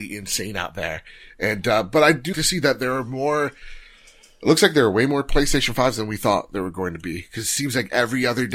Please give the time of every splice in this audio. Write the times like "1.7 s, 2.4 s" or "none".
2.3 s